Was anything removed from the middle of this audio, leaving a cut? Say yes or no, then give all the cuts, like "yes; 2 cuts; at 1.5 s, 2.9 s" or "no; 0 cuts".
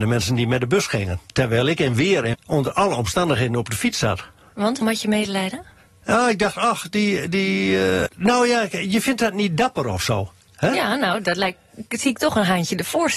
yes; 3 cuts; at 2.3 s, 4.8 s, 8.1 s